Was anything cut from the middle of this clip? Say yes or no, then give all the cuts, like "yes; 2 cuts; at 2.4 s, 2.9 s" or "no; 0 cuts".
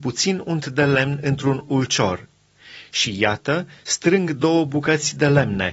no; 0 cuts